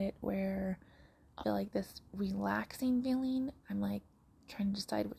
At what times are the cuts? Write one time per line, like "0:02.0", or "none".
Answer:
0:01.4
0:03.6

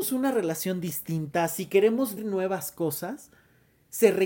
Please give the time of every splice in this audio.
0:02.2

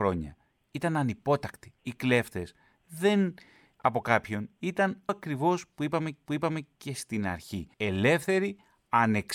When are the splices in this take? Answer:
0:01.8
0:03.7
0:05.1
0:06.3
0:07.7

